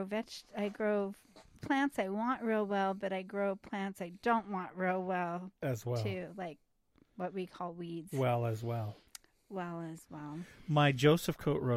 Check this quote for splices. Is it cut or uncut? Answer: uncut